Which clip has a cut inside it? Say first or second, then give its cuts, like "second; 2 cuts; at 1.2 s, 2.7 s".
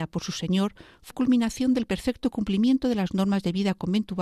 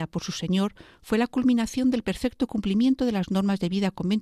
first; 1 cut; at 1.1 s